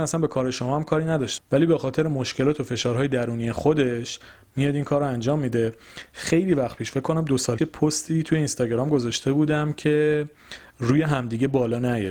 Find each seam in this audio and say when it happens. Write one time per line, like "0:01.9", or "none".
0:01.4
0:07.6

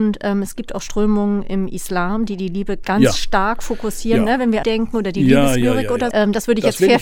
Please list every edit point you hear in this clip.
0:02.8
0:04.6
0:06.1

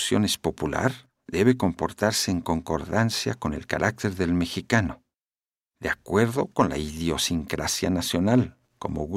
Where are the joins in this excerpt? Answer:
none

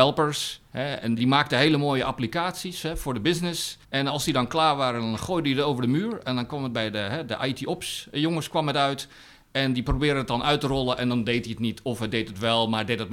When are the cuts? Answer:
0:01.2
0:03.8

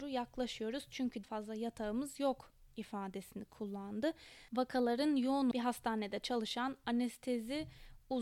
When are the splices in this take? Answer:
0:01.2
0:04.5
0:05.5

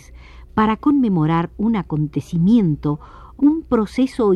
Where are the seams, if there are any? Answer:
0:03.4

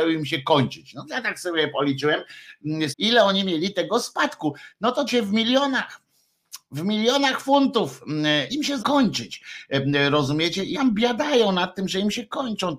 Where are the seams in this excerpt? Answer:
0:02.9
0:05.1
0:08.5
0:08.8
0:10.7

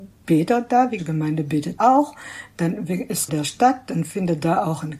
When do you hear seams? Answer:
0:01.0
0:01.8
0:03.3

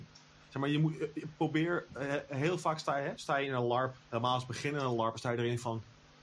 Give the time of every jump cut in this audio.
0:04.0

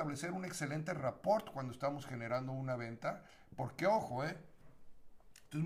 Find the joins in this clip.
none

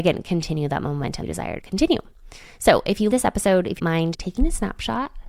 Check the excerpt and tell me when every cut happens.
0:01.2
0:01.6
0:03.1
0:03.8
0:04.1

